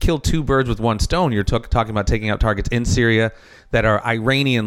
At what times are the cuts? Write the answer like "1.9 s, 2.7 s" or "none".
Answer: none